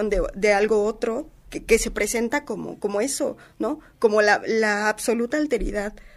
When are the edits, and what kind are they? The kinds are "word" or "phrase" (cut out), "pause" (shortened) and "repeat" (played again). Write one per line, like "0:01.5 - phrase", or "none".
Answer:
none